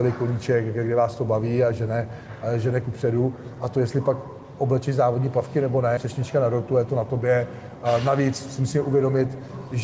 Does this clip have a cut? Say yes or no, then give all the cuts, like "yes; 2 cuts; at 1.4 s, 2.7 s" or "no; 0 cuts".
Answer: yes; 1 cut; at 6.0 s